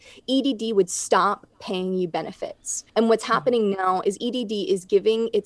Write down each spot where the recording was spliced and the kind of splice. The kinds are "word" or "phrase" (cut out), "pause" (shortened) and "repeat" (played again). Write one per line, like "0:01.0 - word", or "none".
0:02.9 - pause